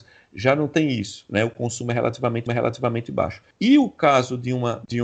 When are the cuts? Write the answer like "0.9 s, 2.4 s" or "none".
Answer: 2.5 s